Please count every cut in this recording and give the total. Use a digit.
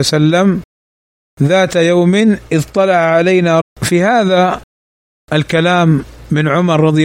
1